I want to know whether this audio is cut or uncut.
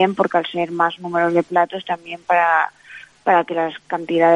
uncut